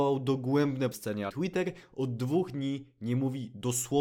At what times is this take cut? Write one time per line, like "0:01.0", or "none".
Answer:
0:00.9
0:01.3